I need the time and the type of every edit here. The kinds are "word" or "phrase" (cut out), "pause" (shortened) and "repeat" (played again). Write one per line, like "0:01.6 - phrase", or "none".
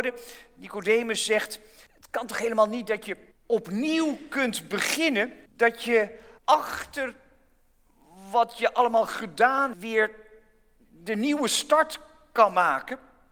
0:01.9 - pause
0:03.3 - pause
0:05.5 - pause
0:06.4 - pause
0:09.7 - phrase